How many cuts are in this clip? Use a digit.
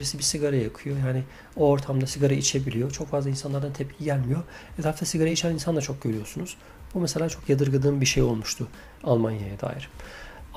0